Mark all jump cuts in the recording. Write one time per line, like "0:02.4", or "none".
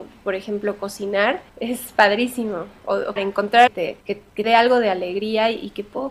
0:01.5
0:03.2
0:03.7
0:04.0
0:04.4